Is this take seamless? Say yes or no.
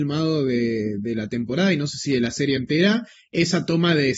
yes